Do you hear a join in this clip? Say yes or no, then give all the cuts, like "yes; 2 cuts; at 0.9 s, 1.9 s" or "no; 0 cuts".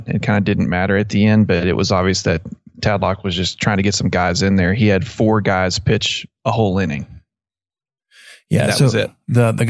no; 0 cuts